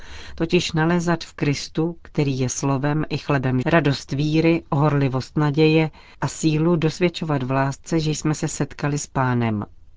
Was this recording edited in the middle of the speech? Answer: yes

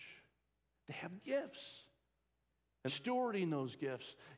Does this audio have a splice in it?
yes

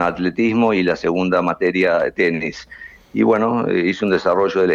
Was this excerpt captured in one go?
yes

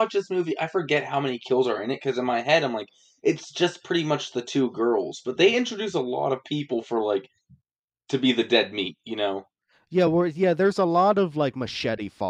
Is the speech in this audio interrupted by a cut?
no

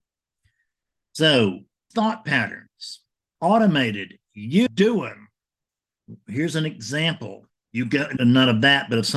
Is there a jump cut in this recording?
yes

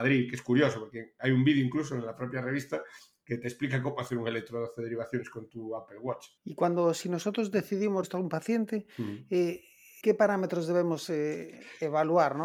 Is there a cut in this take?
yes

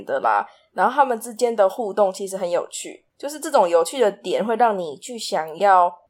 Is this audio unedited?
no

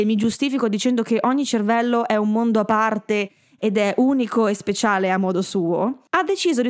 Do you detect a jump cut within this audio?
no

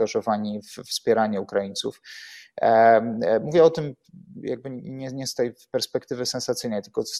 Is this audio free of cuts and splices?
yes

